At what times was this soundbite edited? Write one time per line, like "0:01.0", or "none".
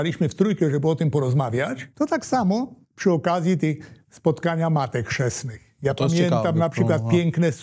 0:01.9
0:02.8
0:04.0